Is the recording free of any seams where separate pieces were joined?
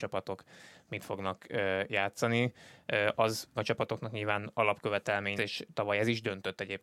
no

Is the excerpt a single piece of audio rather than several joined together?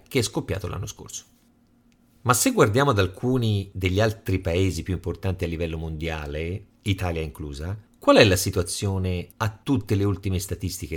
yes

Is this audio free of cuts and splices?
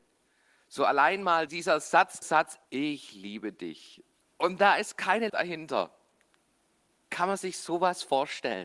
no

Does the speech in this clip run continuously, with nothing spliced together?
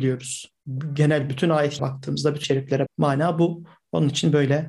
no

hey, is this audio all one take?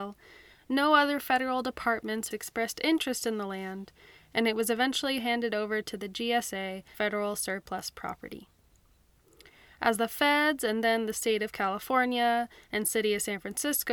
no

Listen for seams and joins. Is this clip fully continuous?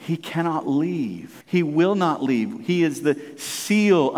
no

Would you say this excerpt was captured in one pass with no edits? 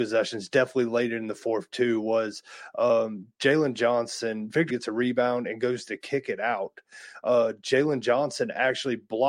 no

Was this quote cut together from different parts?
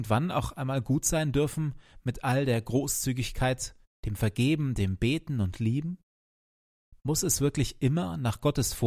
no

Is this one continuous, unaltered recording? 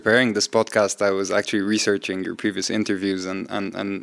yes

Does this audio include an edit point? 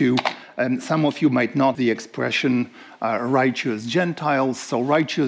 yes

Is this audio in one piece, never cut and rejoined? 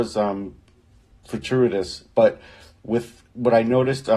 no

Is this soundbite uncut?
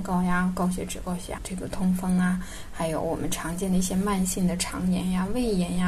no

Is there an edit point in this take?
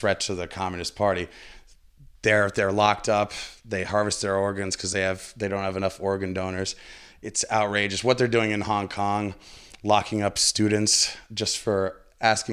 no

